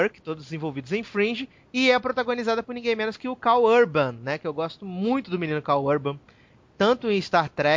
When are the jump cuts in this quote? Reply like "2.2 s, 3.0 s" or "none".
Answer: none